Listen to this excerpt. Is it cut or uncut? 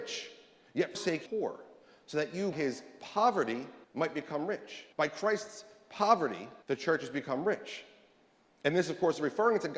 cut